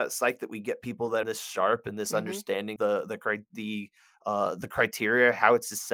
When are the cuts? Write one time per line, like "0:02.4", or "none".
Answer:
0:01.2
0:02.8